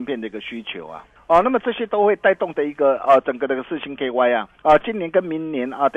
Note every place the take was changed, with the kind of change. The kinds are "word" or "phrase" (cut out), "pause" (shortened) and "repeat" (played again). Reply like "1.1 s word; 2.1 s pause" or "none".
1.1 s pause; 4.5 s pause